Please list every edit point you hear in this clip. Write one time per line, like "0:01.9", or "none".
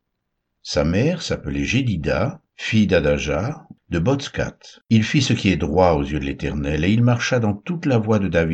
0:02.5
0:04.8